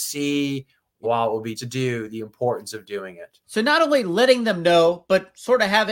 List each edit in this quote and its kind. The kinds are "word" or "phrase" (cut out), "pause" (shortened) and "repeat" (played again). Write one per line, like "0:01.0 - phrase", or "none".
0:01.0 - word
0:01.6 - word
0:03.4 - pause